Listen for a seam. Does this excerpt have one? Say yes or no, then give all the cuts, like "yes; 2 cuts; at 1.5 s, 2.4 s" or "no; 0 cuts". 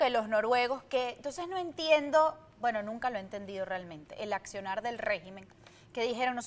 no; 0 cuts